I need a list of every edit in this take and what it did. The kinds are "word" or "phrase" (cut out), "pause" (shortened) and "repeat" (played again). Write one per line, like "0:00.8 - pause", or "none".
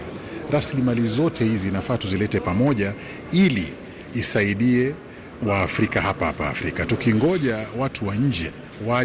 0:05.4 - word